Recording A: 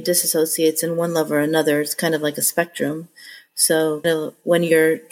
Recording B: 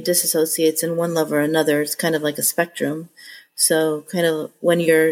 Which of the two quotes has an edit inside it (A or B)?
A